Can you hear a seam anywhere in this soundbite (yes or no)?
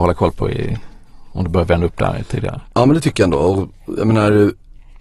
no